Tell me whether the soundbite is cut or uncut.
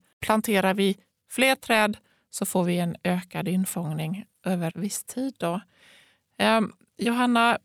cut